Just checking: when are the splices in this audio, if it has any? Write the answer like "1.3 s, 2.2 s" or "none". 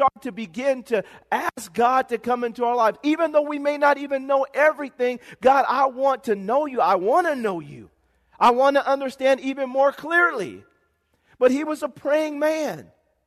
none